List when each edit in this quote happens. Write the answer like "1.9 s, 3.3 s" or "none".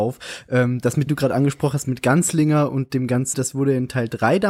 1.1 s, 3.3 s